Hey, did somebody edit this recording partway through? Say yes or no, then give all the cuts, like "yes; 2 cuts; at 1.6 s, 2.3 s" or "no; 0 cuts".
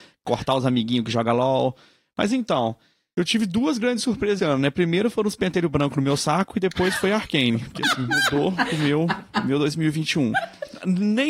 yes; 1 cut; at 4.4 s